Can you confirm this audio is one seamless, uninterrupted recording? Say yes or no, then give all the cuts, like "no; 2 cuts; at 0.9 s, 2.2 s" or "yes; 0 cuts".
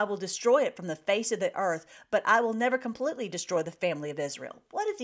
yes; 0 cuts